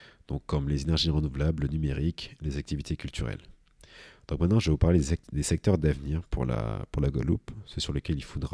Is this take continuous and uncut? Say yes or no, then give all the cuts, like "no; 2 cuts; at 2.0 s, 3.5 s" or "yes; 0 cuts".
yes; 0 cuts